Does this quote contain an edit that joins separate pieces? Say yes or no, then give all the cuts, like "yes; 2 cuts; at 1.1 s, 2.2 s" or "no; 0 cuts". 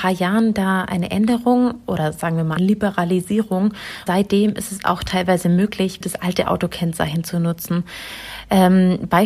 yes; 3 cuts; at 2.6 s, 4.1 s, 6.0 s